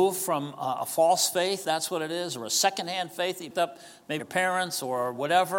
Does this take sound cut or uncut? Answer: cut